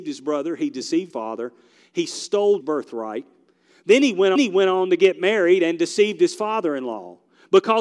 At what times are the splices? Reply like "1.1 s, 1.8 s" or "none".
1.1 s, 2.6 s, 4.4 s